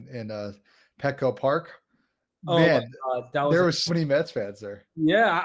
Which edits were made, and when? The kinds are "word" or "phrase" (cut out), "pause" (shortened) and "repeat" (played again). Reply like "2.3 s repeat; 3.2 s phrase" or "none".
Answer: 3.9 s word